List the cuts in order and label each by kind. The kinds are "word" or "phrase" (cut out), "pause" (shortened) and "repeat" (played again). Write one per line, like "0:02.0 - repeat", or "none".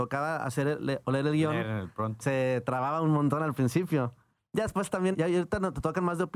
0:02.2 - word
0:05.1 - word